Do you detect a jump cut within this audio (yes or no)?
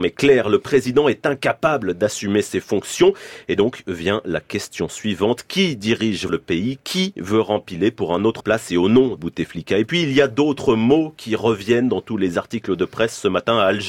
yes